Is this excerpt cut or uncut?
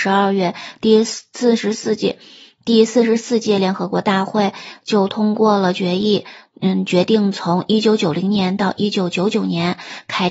uncut